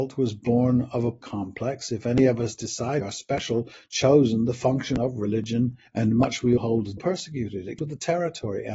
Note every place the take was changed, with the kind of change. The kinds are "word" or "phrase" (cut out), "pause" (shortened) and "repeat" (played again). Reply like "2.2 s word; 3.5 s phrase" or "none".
1.2 s word; 3.0 s word; 5.9 s pause; 6.6 s word; 7.0 s phrase; 7.8 s word